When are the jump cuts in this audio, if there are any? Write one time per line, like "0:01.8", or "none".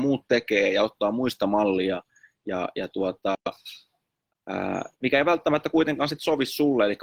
0:04.9